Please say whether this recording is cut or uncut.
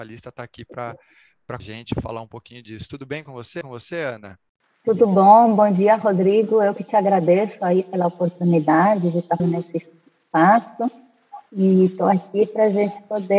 cut